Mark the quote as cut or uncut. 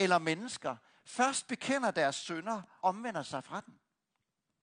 cut